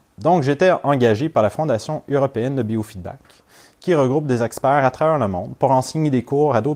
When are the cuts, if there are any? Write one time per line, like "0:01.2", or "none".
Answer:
none